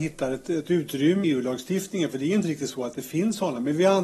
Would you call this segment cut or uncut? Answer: cut